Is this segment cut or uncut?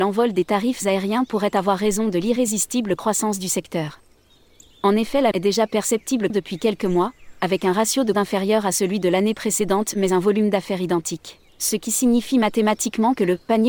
cut